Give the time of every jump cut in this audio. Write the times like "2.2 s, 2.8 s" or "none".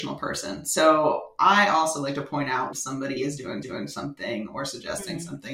2.7 s, 3.6 s